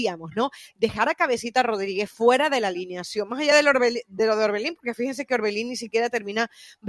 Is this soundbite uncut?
yes; 0 cuts

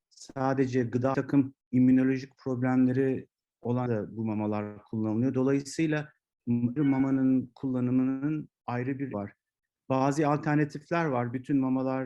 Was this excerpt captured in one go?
no; 5 cuts; at 1.1 s, 1.6 s, 3.9 s, 6.8 s, 9.1 s

